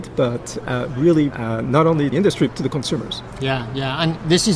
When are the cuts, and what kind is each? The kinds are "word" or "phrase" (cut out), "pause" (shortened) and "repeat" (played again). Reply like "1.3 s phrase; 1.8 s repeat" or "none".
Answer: 1.3 s phrase; 2.1 s phrase; 2.5 s word